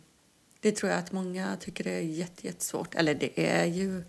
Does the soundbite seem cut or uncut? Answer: uncut